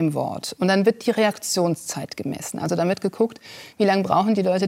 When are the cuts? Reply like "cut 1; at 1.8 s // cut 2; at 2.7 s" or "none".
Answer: none